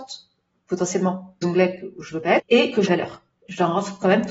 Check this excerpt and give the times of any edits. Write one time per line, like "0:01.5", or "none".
0:01.4
0:02.4
0:02.9